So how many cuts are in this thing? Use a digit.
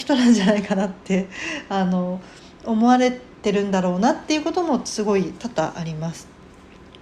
0